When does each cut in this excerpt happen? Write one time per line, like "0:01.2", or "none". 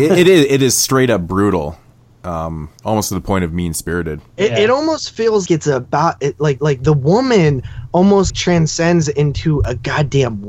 0:02.8
0:04.3
0:05.5
0:06.6
0:08.3